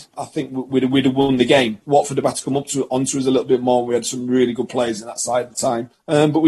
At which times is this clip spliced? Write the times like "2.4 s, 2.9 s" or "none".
1.8 s, 5.5 s